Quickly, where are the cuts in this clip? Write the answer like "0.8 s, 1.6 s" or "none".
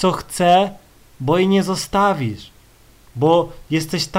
none